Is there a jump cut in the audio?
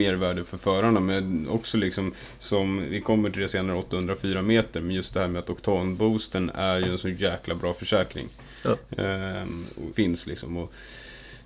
yes; 1 cut; at 9.9 s

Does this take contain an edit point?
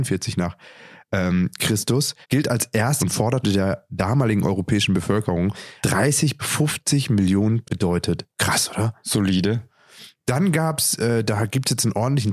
yes; 7 cuts; at 2.2 s, 3.0 s, 3.4 s, 5.8 s, 6.4 s, 7.6 s, 8.3 s

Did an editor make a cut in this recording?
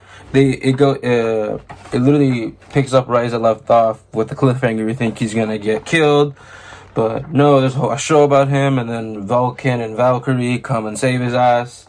no; 0 cuts

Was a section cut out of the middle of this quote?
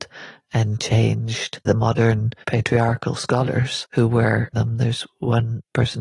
yes; 3 cuts; at 1.7 s, 2.4 s, 4.5 s

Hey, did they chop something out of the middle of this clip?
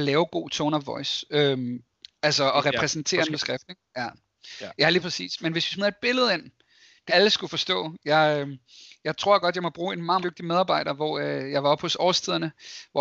yes; 4 cuts; at 2.0 s, 3.3 s, 7.1 s, 10.2 s

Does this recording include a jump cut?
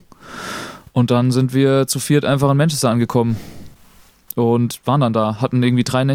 no; 0 cuts

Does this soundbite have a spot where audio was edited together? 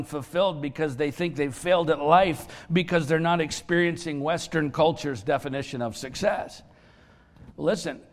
no; 0 cuts

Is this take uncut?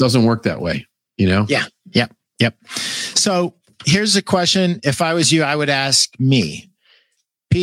yes; 0 cuts

